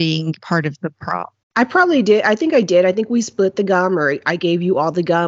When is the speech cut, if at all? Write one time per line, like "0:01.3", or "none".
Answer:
0:01.4